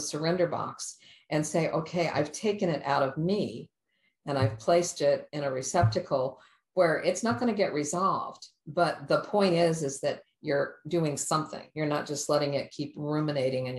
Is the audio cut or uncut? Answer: uncut